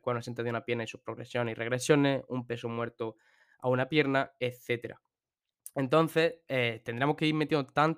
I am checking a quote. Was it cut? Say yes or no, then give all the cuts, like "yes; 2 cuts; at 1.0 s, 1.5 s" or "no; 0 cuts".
no; 0 cuts